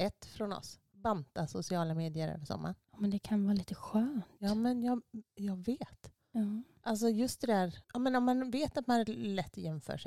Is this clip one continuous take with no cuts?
no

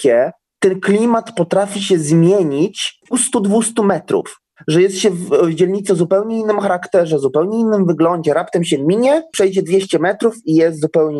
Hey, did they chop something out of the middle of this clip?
yes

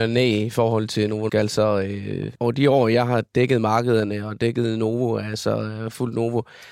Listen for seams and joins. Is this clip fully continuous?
no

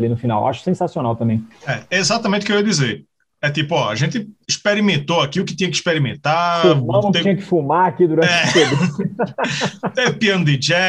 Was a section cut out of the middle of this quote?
no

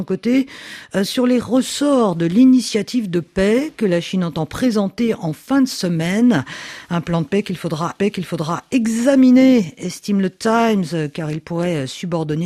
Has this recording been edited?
yes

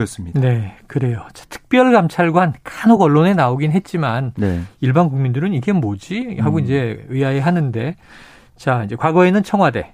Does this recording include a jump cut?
no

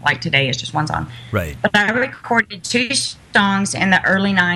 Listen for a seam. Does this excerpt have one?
no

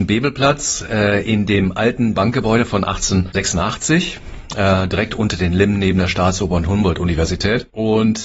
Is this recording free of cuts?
no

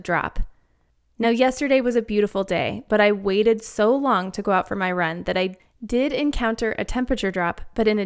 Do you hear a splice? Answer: no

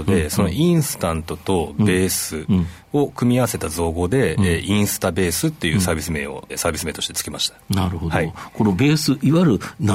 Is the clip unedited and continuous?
no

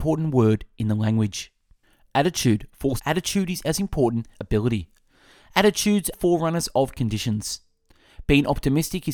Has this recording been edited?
yes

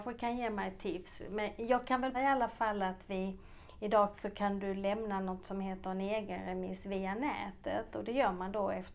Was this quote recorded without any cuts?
no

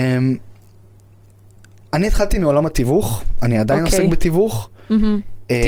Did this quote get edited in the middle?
no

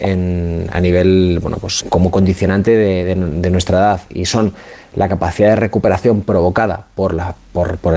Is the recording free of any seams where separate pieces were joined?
no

